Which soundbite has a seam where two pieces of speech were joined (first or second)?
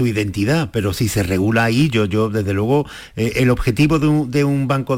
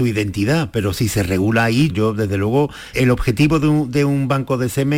second